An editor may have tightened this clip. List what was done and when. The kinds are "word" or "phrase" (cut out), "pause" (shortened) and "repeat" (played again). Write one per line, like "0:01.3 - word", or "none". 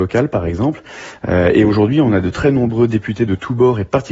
none